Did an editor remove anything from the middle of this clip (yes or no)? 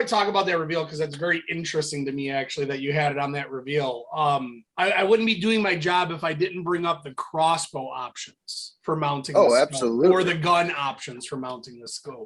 yes